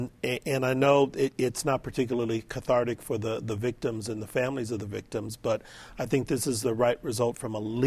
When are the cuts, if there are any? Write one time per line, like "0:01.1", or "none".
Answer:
none